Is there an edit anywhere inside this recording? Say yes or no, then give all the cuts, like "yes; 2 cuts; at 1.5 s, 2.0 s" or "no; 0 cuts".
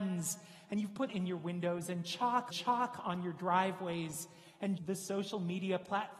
yes; 3 cuts; at 1.1 s, 2.5 s, 4.8 s